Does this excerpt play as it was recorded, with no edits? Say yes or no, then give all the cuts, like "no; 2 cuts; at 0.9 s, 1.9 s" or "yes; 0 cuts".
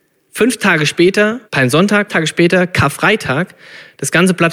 no; 2 cuts; at 1.5 s, 2.1 s